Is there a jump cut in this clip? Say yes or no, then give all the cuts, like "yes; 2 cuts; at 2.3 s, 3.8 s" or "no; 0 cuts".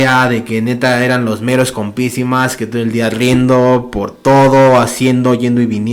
no; 0 cuts